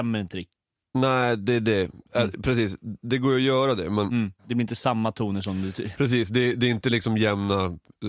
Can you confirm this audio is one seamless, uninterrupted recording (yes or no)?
no